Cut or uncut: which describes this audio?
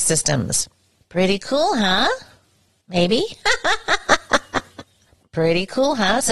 uncut